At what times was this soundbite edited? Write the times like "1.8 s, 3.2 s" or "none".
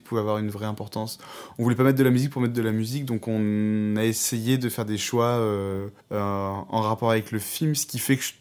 6.0 s